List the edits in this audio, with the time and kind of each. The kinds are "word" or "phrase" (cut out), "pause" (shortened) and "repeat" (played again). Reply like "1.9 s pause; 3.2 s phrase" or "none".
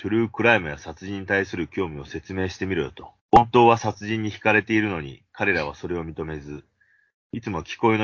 3.2 s pause